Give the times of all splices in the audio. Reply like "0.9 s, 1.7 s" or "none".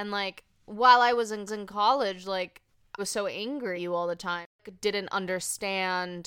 1.5 s, 3.0 s, 3.7 s